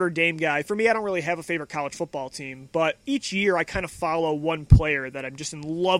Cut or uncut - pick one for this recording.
uncut